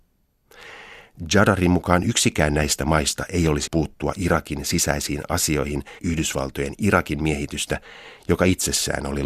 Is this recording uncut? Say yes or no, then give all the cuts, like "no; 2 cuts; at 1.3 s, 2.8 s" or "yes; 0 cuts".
no; 2 cuts; at 3.7 s, 6.0 s